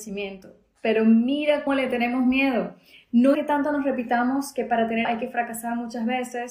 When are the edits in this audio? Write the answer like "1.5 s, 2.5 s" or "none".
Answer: 1.7 s, 3.3 s, 5.0 s